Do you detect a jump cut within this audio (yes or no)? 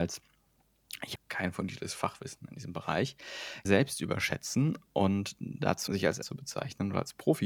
yes